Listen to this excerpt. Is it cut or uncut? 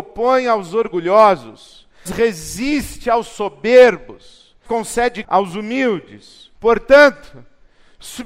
cut